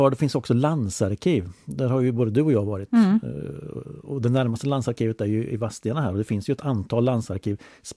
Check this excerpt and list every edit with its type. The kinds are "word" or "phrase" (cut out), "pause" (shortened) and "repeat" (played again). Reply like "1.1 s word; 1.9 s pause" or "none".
none